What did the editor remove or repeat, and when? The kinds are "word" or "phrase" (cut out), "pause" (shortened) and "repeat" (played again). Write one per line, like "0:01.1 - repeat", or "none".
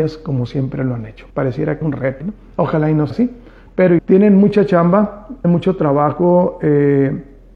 0:01.3 - pause
0:01.8 - word
0:02.2 - word
0:03.1 - word
0:04.0 - word
0:05.4 - word